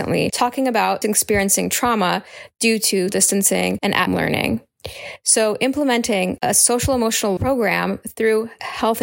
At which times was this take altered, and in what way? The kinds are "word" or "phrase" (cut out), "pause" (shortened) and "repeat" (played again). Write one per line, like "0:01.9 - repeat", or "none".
0:01.0 - word
0:03.1 - word
0:04.1 - word
0:07.4 - word